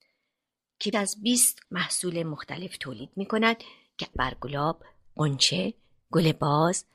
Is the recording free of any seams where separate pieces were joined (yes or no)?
no